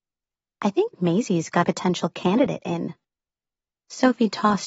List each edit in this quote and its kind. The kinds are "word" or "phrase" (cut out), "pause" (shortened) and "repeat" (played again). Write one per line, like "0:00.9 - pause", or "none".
0:01.6 - word